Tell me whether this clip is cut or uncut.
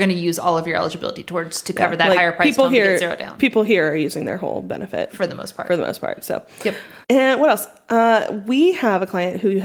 cut